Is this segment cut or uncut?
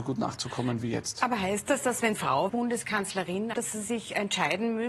cut